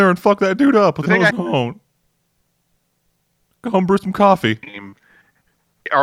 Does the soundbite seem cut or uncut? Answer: cut